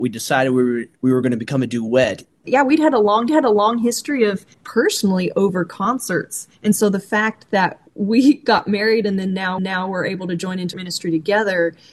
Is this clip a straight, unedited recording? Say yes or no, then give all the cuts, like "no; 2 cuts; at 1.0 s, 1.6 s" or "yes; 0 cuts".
no; 6 cuts; at 3.3 s, 4.5 s, 6.5 s, 7.9 s, 9.6 s, 10.7 s